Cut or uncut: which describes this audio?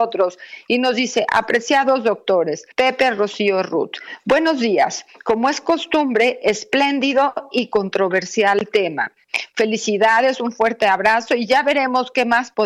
cut